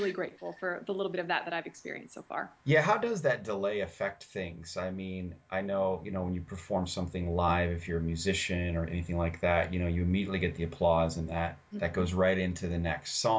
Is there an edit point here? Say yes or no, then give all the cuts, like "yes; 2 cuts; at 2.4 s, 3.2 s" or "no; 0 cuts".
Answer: yes; 1 cut; at 2.6 s